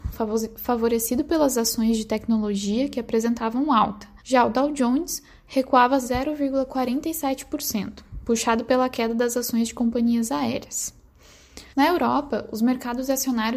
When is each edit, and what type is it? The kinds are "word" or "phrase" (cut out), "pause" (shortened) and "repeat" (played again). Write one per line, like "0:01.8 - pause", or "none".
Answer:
0:04.2 - pause
0:11.7 - pause